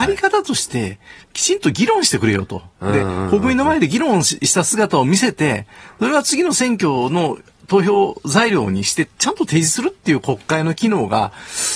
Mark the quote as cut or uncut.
uncut